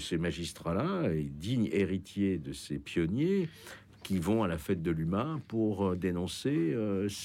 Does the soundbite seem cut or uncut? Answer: uncut